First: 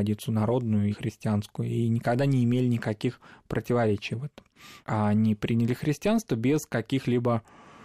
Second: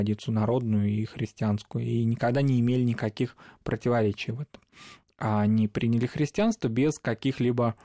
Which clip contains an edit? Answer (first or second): first